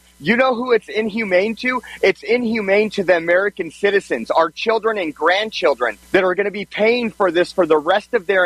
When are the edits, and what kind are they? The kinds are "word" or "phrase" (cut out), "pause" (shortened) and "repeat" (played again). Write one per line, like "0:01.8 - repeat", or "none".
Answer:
0:06.0 - pause